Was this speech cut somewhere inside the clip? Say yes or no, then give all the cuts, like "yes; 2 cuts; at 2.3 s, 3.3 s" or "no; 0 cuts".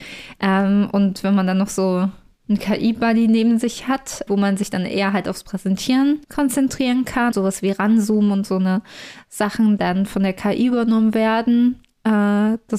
yes; 4 cuts; at 2.4 s, 4.3 s, 6.2 s, 7.3 s